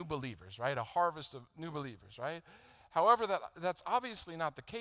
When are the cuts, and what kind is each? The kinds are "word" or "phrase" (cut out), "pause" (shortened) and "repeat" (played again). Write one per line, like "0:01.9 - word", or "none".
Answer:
none